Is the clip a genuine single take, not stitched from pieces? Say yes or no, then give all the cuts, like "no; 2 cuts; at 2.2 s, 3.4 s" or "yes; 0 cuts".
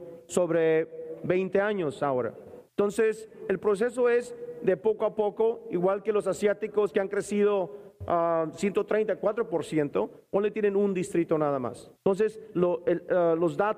no; 2 cuts; at 2.7 s, 12.0 s